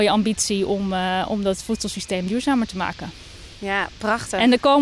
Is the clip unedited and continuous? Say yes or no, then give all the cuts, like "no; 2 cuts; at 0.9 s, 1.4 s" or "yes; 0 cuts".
yes; 0 cuts